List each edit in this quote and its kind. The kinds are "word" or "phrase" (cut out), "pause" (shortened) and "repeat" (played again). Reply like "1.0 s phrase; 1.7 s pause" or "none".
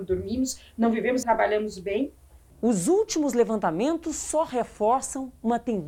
1.2 s word

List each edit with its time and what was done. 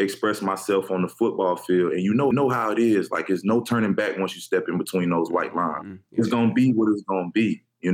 2.3 s repeat; 6.0 s pause

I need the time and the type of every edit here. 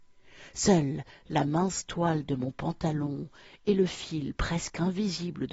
none

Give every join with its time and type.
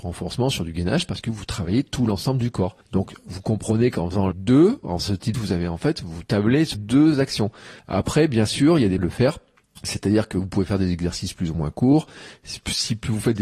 2.8 s pause; 4.3 s word; 5.0 s word; 5.3 s word; 6.7 s word; 7.8 s pause; 9.0 s word; 9.6 s pause

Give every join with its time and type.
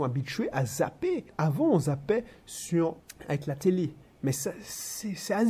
none

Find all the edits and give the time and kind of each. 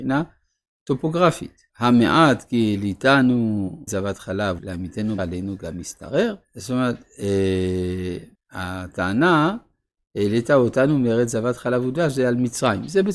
1.7 s pause; 3.9 s word; 4.6 s word; 5.2 s phrase; 6.4 s pause; 8.3 s pause

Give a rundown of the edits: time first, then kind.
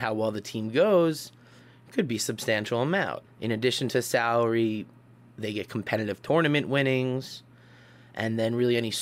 3.3 s pause

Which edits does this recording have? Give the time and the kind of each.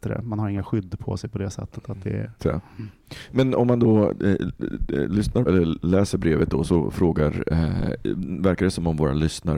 2.4 s word; 5.5 s word

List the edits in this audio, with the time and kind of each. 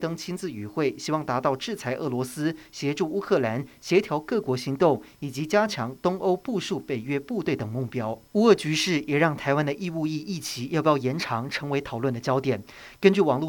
8.3 s pause

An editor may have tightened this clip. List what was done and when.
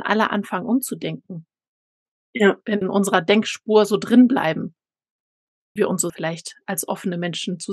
2.8 s word; 5.8 s word; 6.1 s word

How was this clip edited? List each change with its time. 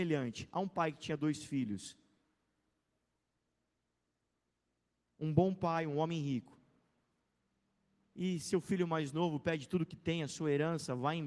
none

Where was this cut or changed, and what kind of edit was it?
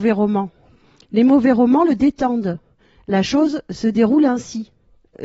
none

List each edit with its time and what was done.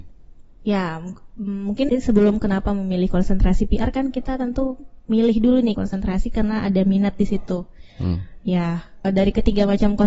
1.9 s word; 5.7 s phrase; 9.0 s word

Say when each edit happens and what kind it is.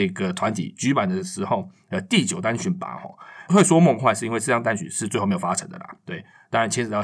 none

